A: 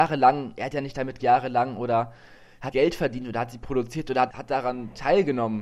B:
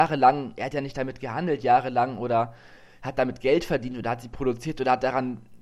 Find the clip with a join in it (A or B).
A